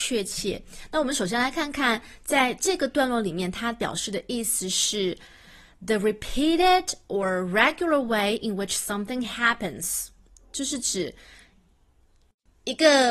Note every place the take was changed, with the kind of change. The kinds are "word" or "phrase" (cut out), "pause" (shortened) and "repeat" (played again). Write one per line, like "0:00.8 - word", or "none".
none

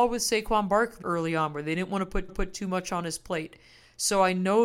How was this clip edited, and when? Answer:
0:01.0 - word
0:02.3 - repeat

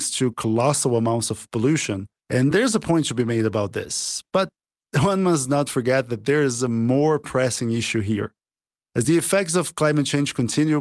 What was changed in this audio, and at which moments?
none

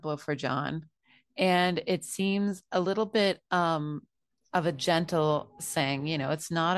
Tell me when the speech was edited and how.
none

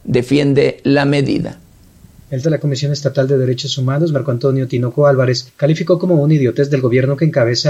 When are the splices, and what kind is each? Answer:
0:02.4 - word

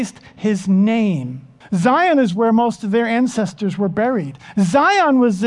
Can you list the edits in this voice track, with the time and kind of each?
0:01.6 - pause

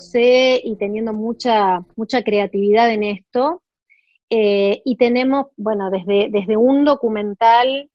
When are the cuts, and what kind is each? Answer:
0:01.9 - pause

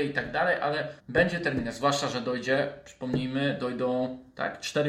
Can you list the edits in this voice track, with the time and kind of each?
0:01.0 - pause

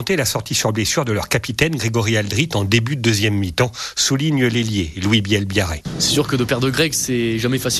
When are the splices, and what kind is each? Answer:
none

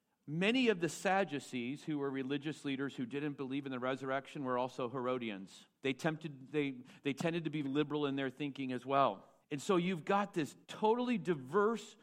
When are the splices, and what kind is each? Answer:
0:05.7 - pause
0:07.6 - word
0:09.4 - pause
0:10.6 - pause

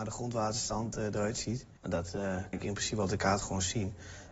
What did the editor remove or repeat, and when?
0:01.8 - pause
0:02.5 - word

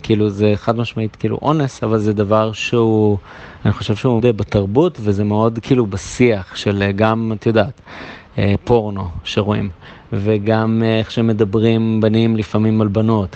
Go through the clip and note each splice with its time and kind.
0:04.2 - word

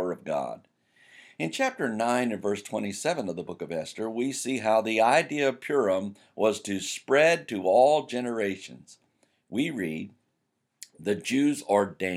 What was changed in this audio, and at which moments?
none

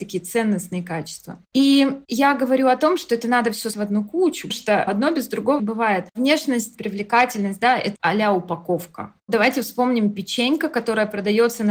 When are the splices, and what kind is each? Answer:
0:03.7 - word
0:04.5 - word
0:04.9 - word
0:05.6 - word
0:06.7 - word
0:08.0 - word

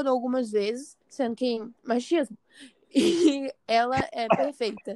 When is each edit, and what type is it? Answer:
0:01.0 - pause
0:01.8 - pause

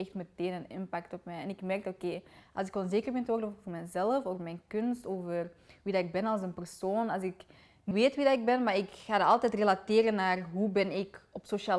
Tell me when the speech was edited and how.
0:07.9 - word

